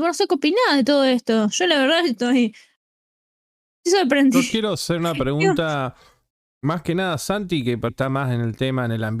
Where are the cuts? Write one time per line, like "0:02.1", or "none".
0:07.9